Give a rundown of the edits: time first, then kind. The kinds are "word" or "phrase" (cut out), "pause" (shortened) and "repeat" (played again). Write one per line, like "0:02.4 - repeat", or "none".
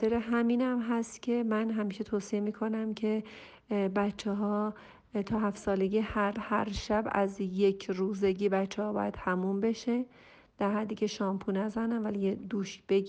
0:06.3 - word